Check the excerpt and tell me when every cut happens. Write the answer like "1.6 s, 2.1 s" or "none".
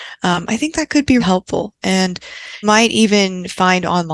1.2 s, 2.6 s